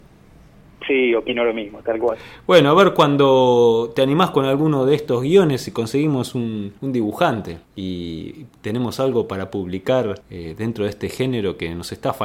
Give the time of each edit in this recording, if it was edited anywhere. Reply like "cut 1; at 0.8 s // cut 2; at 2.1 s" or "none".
cut 1; at 6.8 s // cut 2; at 7.6 s // cut 3; at 10.2 s